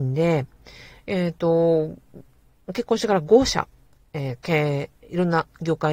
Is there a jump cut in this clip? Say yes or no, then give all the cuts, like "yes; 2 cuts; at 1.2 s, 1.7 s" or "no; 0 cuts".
yes; 1 cut; at 4.4 s